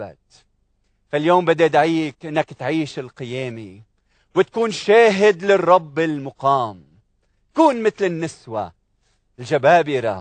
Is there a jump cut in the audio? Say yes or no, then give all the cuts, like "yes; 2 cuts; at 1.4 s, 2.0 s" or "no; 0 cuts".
no; 0 cuts